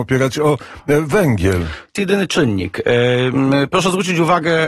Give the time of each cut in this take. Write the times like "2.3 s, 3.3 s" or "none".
2.0 s